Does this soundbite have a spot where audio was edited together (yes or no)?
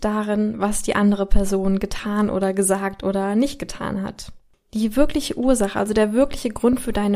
no